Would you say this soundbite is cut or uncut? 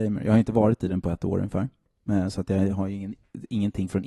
uncut